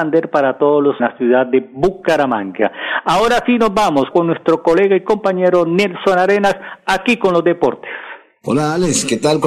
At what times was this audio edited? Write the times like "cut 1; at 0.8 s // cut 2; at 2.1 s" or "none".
cut 1; at 1.0 s // cut 2; at 4.1 s

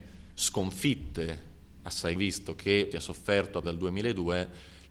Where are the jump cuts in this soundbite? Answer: cut 1; at 2.2 s // cut 2; at 2.9 s // cut 3; at 3.6 s

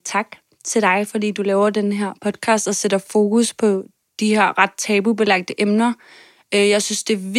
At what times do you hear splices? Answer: none

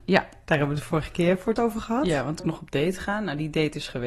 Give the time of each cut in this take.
cut 1; at 1.6 s // cut 2; at 2.4 s

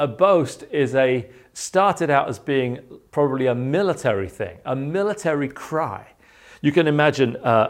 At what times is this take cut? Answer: none

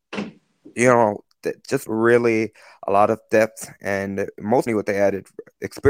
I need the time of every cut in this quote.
cut 1; at 1.9 s // cut 2; at 4.7 s

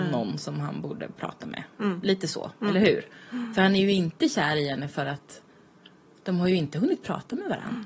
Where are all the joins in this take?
none

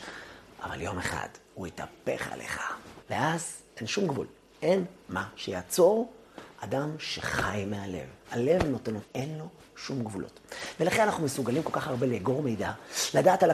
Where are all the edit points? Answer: cut 1; at 3.0 s // cut 2; at 6.5 s // cut 3; at 8.2 s // cut 4; at 9.0 s

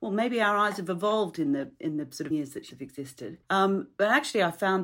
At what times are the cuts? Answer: cut 1; at 2.3 s // cut 2; at 2.7 s // cut 3; at 3.4 s

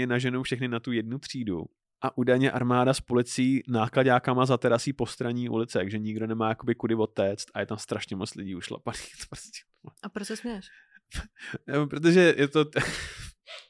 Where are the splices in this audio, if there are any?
cut 1; at 1.8 s // cut 2; at 10.0 s

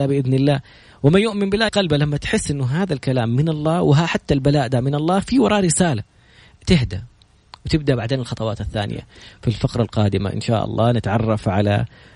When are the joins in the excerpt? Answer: cut 1; at 1.7 s

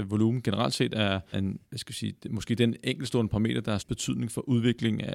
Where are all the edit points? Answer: cut 1; at 1.3 s // cut 2; at 1.6 s // cut 3; at 3.8 s

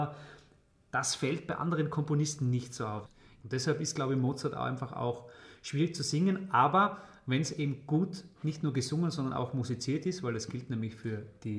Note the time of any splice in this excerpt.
none

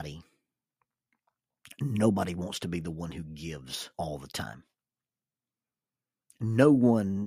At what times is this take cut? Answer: cut 1; at 3.9 s

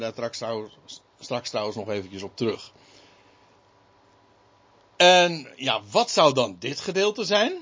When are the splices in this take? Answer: none

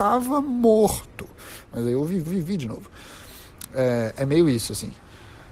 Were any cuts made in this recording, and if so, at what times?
cut 1; at 2.3 s

